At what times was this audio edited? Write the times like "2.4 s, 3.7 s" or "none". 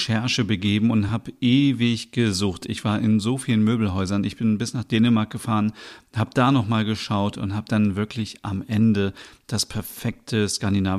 none